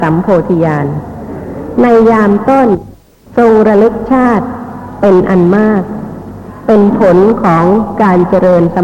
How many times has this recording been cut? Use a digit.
1